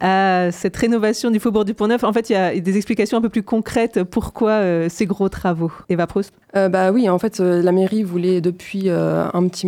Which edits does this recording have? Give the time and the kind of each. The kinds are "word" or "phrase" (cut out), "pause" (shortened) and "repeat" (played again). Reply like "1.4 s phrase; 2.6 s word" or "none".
5.8 s pause; 6.4 s pause